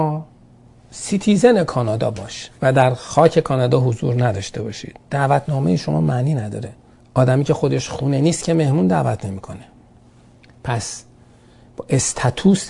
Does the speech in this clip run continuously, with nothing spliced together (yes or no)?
no